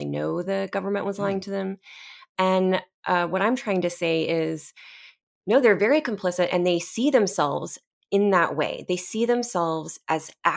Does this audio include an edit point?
no; 0 cuts

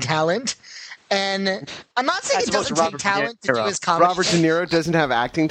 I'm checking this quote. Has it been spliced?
yes; 1 cut; at 1.9 s

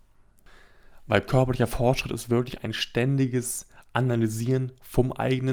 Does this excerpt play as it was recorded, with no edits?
yes; 0 cuts

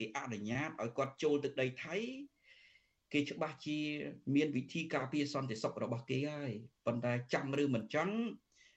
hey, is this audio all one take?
yes; 0 cuts

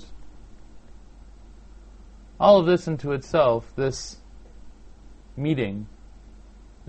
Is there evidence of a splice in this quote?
no; 0 cuts

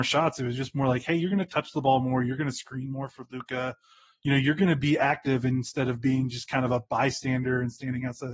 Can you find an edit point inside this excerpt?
no; 0 cuts

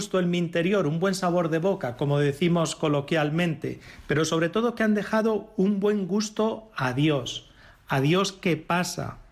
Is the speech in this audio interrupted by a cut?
no; 0 cuts

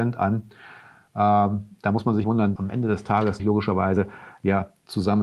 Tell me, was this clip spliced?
yes; 3 cuts; at 2.2 s, 2.6 s, 3.4 s

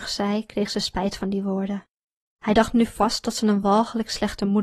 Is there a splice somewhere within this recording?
no; 0 cuts

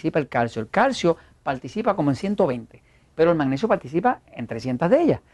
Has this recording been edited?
no; 0 cuts

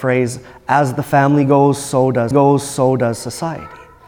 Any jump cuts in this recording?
yes; 1 cut; at 2.3 s

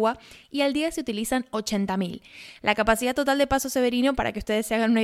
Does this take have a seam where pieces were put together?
no; 0 cuts

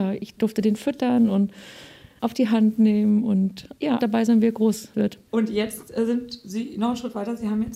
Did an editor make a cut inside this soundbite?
yes; 1 cut; at 4.0 s

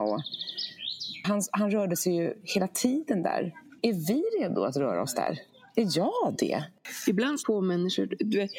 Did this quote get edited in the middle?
yes; 3 cuts; at 1.2 s, 3.8 s, 7.4 s

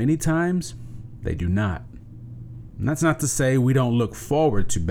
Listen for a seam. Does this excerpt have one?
no; 0 cuts

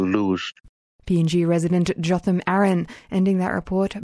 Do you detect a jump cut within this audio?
no; 0 cuts

